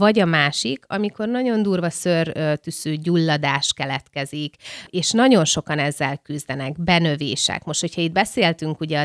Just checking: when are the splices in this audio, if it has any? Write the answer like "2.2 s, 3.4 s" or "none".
none